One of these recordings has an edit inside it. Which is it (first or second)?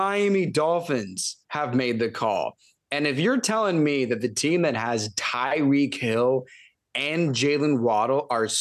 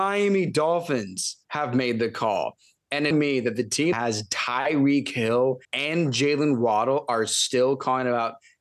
second